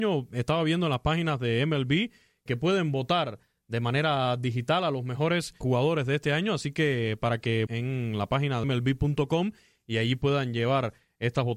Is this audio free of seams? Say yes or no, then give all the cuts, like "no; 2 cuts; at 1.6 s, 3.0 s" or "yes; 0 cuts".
no; 4 cuts; at 2.5 s, 5.6 s, 7.7 s, 8.6 s